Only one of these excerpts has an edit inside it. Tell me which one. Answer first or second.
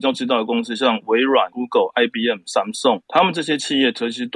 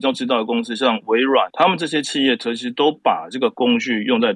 second